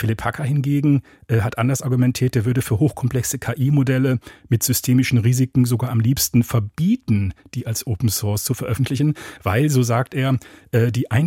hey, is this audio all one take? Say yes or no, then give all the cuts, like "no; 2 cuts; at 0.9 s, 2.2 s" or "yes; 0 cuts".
yes; 0 cuts